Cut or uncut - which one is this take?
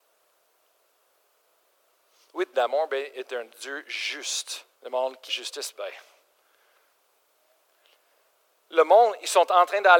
cut